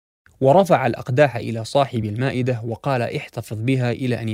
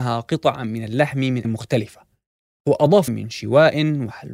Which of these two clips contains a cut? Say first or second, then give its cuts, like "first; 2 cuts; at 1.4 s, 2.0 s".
second; 2 cuts; at 1.4 s, 3.1 s